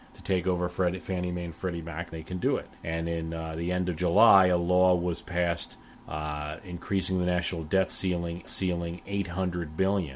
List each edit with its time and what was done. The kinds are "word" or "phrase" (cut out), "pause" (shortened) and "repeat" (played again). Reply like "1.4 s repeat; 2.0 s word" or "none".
2.1 s word; 2.7 s pause; 5.9 s pause; 8.4 s repeat